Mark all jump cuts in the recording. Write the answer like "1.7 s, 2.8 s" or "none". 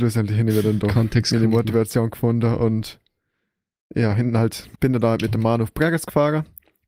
4.8 s